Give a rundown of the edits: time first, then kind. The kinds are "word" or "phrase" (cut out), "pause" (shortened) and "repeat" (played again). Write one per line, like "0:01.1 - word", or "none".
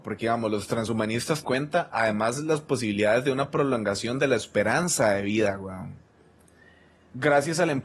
0:01.4 - phrase